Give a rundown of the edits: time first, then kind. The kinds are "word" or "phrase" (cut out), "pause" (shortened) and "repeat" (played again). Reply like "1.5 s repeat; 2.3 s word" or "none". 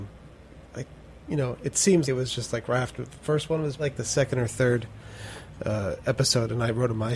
2.0 s word; 3.8 s word